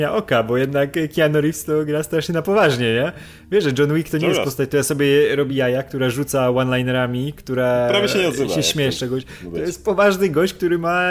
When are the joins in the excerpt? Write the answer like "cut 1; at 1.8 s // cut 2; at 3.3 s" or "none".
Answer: none